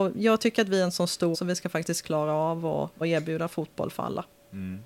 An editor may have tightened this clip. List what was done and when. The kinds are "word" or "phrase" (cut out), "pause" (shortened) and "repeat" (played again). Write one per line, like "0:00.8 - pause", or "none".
0:01.3 - word
0:03.0 - word